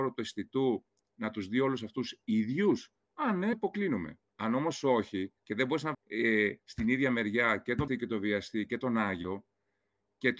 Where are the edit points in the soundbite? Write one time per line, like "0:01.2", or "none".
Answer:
0:03.5
0:04.3
0:05.4
0:05.9
0:06.6
0:07.9